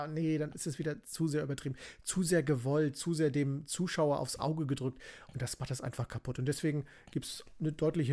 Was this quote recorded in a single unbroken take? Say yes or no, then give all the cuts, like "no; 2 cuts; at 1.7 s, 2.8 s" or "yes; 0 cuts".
yes; 0 cuts